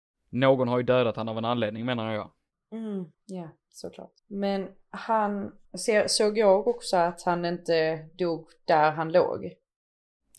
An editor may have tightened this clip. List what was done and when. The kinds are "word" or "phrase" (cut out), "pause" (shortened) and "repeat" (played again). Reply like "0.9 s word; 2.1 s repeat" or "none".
3.1 s pause; 4.2 s pause; 5.6 s pause